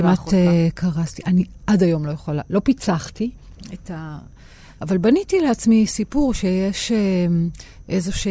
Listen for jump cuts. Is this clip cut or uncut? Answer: uncut